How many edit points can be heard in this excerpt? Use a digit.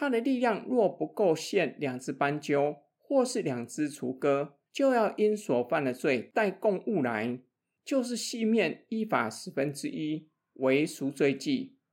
1